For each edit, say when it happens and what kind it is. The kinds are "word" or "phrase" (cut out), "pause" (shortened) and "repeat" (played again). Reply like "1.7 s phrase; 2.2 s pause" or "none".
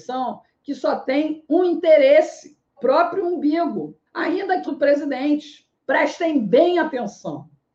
2.8 s phrase; 4.1 s pause; 4.7 s phrase; 5.8 s pause